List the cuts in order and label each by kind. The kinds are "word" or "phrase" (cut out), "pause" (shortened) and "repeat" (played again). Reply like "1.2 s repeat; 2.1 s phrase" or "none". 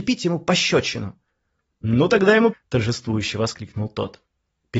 2.5 s phrase